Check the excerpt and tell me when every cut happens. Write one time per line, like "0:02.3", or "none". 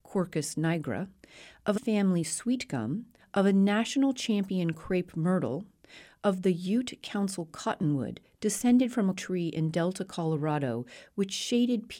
0:01.8
0:03.2
0:09.2